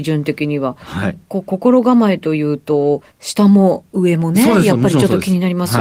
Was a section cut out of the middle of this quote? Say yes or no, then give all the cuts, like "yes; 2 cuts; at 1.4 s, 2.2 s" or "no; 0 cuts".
yes; 1 cut; at 3.1 s